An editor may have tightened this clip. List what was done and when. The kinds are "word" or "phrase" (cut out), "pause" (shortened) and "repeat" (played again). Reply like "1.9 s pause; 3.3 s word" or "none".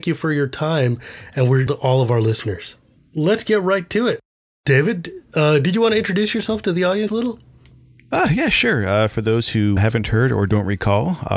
1.7 s word; 7.1 s word; 9.8 s word